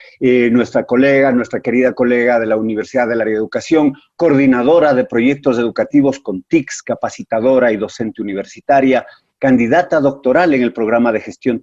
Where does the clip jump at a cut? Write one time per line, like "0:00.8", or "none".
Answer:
none